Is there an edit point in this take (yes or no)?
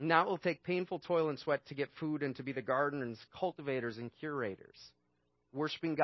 no